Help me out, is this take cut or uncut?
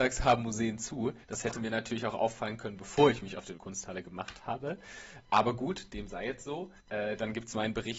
cut